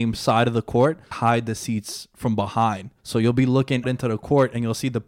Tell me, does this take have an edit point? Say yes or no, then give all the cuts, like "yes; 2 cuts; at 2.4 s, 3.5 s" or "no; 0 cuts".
yes; 3 cuts; at 1.1 s, 3.0 s, 3.8 s